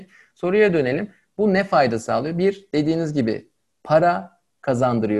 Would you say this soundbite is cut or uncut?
uncut